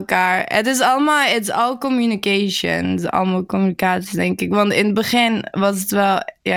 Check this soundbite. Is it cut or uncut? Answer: uncut